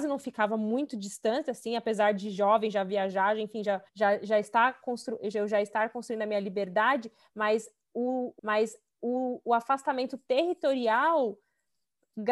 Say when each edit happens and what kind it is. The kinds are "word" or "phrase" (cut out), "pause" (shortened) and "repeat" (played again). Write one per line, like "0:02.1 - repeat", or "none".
0:03.9 - pause
0:08.4 - repeat